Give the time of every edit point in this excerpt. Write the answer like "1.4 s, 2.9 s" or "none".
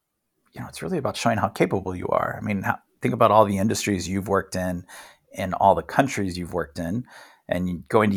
none